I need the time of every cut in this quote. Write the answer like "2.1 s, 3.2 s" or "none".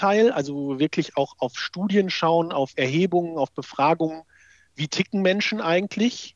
none